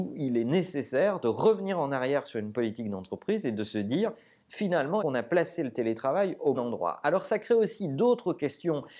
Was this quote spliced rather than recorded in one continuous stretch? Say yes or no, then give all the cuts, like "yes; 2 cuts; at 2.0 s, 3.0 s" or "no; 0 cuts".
yes; 2 cuts; at 5.0 s, 6.5 s